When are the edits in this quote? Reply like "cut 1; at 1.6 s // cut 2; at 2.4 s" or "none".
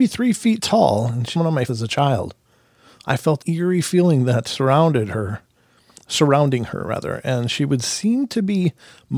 cut 1; at 1.3 s // cut 2; at 1.7 s // cut 3; at 3.4 s